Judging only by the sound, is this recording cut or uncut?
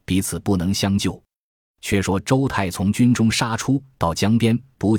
uncut